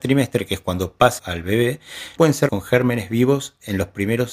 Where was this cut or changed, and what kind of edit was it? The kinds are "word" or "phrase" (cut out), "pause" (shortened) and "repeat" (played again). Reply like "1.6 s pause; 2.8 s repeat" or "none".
1.2 s phrase; 2.2 s word; 2.5 s word